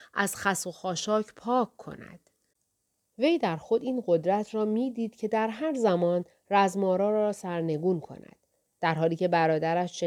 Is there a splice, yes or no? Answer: no